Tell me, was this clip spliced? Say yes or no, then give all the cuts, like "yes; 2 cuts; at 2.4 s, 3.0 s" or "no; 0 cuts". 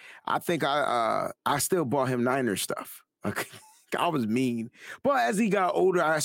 yes; 1 cut; at 1.4 s